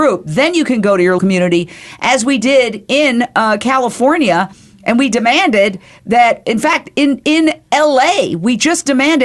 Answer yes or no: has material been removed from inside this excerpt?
yes